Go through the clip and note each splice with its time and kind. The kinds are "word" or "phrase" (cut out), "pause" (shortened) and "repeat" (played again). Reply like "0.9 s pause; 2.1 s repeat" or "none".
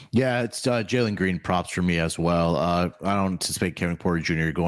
none